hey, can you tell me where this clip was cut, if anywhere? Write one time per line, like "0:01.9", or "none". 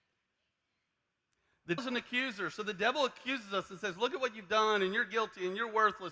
0:01.8